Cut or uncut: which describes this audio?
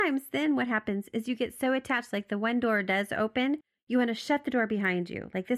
uncut